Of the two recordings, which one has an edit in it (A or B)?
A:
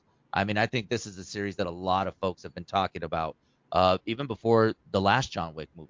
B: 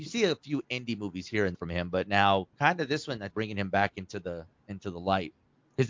B